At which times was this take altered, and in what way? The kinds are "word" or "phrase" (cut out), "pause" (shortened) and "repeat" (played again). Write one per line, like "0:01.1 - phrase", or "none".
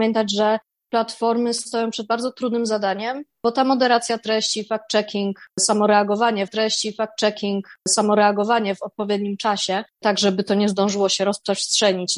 0:06.5 - repeat
0:09.9 - pause